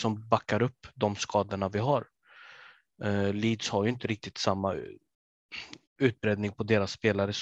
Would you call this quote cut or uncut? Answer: cut